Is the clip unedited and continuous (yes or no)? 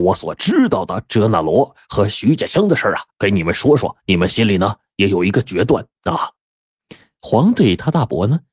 no